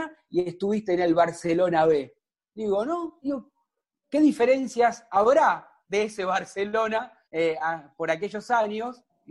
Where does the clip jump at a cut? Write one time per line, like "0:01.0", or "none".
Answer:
0:07.3